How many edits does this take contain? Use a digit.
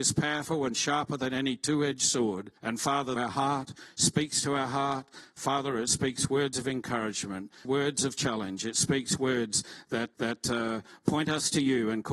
4